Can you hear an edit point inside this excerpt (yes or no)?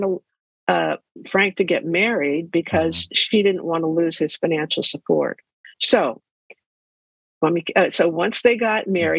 yes